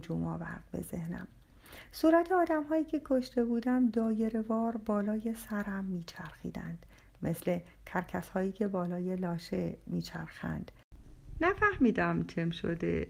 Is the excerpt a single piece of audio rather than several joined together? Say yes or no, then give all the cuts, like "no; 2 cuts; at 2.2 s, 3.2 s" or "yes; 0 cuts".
yes; 0 cuts